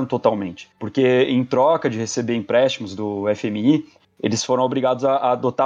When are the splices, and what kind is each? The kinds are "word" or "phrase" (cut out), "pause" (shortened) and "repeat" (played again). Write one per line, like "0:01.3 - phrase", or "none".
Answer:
none